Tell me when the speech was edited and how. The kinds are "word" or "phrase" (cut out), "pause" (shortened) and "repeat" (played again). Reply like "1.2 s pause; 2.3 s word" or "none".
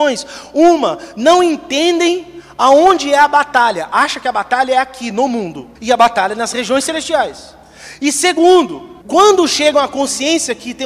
5.8 s pause; 9.0 s pause